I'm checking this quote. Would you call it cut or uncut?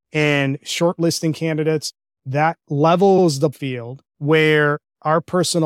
cut